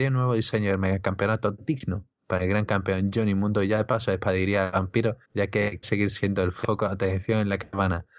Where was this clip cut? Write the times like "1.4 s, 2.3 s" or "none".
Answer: 5.2 s, 5.8 s